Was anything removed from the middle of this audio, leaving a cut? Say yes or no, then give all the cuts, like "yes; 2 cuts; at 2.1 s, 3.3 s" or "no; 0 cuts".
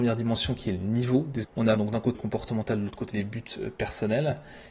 yes; 4 cuts; at 1.4 s, 1.8 s, 2.1 s, 3.1 s